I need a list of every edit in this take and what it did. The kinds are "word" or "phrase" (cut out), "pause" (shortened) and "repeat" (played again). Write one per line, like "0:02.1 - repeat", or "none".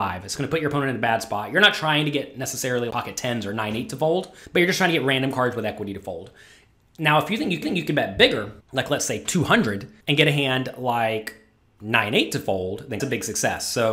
0:02.9 - word
0:04.5 - pause
0:07.6 - repeat
0:08.6 - pause
0:10.0 - pause
0:13.0 - phrase